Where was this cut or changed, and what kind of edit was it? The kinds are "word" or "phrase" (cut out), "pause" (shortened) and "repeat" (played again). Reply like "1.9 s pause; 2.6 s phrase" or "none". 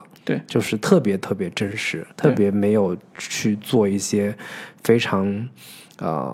2.1 s pause